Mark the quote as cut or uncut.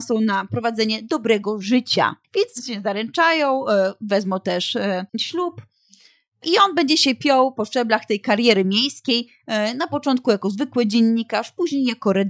cut